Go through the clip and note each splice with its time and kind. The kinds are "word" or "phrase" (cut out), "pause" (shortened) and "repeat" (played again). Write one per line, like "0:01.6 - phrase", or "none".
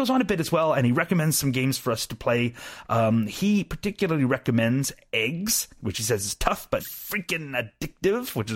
0:06.8 - word